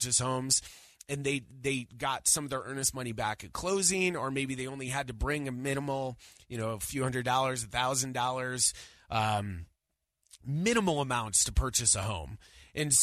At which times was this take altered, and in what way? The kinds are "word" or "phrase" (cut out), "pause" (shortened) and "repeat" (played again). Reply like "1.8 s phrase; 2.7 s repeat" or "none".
none